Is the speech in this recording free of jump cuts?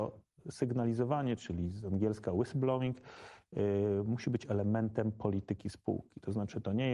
yes; 0 cuts

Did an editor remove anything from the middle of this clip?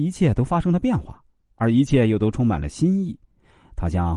no; 0 cuts

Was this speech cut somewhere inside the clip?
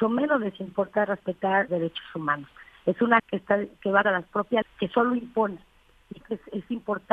yes; 5 cuts; at 1.7 s, 3.2 s, 4.0 s, 4.6 s, 6.2 s

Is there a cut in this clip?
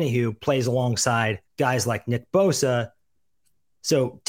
yes; 1 cut; at 1.5 s

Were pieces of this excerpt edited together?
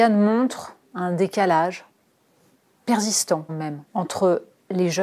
yes; 2 cuts; at 3.5 s, 3.9 s

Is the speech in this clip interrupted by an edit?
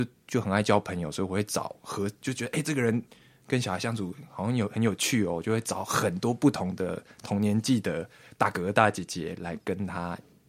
no; 0 cuts

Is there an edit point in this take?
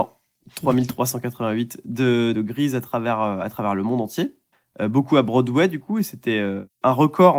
yes; 2 cuts; at 2.3 s, 4.5 s

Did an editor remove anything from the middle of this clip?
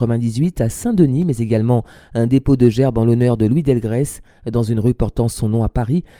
no; 0 cuts

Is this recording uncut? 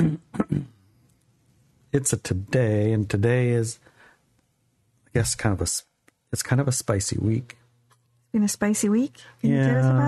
yes; 0 cuts

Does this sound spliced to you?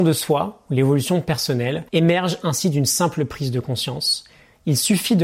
yes; 1 cut; at 1.9 s

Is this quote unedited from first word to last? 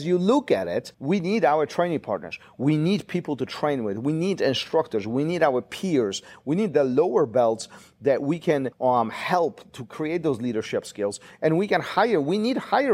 no; 2 cuts; at 0.9 s, 8.7 s

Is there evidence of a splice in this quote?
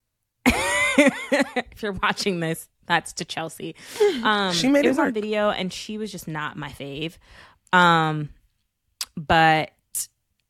no; 0 cuts

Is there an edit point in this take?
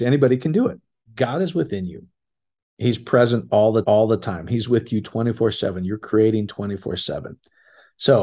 yes; 2 cuts; at 0.9 s, 3.8 s

